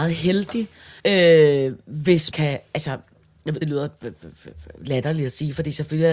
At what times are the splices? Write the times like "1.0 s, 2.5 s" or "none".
1.0 s, 2.3 s, 3.6 s